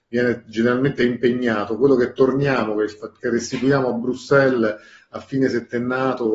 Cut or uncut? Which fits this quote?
uncut